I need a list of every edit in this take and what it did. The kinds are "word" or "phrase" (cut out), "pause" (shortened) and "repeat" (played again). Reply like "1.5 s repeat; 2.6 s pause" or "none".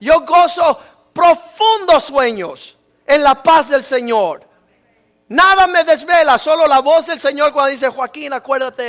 none